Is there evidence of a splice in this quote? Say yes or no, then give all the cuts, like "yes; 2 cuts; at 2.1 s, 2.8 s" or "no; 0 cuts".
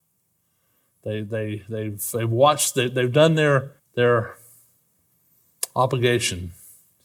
yes; 1 cut; at 3.8 s